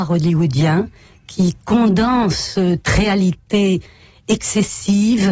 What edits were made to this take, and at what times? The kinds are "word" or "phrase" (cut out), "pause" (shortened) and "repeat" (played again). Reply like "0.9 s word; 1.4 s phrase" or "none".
2.8 s phrase